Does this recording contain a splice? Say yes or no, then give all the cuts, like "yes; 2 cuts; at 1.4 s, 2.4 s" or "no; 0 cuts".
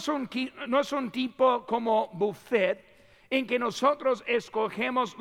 no; 0 cuts